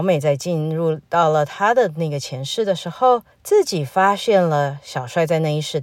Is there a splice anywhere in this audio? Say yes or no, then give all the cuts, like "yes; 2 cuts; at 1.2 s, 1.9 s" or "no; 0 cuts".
yes; 1 cut; at 3.3 s